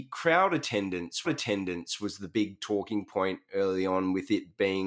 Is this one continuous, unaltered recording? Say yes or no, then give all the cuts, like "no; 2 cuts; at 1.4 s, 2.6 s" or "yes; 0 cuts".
no; 1 cut; at 1.2 s